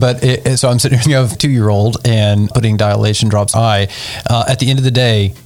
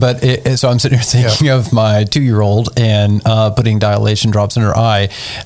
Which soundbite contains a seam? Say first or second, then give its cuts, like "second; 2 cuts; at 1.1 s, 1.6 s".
first; 4 cuts; at 1.0 s, 1.3 s, 2.5 s, 3.5 s